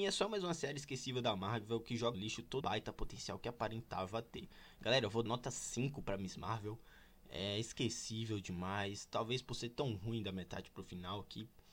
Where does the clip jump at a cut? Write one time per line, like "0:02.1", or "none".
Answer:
0:02.1
0:02.6
0:05.3